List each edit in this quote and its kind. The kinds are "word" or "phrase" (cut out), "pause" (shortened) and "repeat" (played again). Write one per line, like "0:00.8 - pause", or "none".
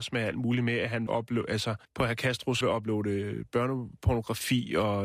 0:01.1 - word
0:01.8 - pause
0:02.6 - word